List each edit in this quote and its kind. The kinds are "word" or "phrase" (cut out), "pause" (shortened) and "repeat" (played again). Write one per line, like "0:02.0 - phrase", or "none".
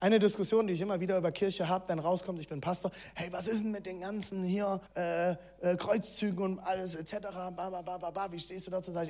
0:04.9 - pause